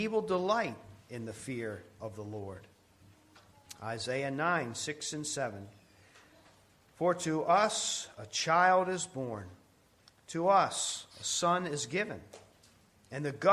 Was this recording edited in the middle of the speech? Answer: no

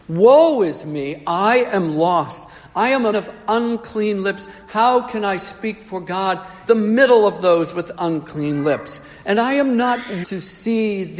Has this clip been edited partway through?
yes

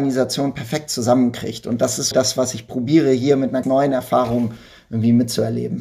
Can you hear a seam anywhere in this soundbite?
yes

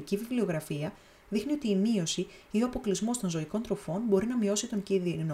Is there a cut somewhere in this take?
no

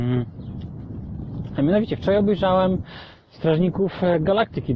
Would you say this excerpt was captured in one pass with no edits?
yes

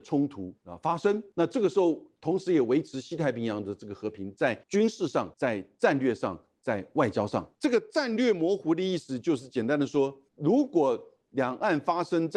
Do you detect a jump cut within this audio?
yes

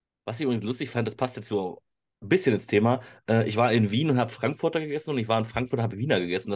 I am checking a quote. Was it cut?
no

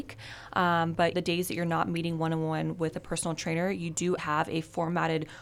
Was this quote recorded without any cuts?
no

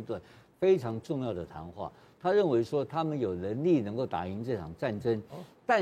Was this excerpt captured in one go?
yes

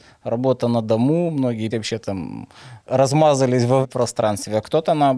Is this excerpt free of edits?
no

